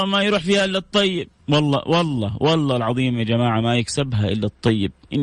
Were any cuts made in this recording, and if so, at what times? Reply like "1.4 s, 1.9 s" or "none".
1.4 s